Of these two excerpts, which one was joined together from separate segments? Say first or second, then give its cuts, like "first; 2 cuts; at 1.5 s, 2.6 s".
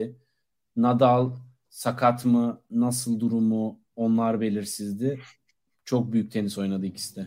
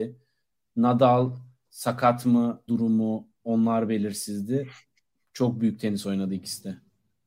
second; 1 cut; at 2.7 s